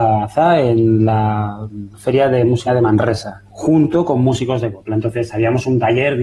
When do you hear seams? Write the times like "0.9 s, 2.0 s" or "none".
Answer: 1.9 s, 2.7 s, 3.5 s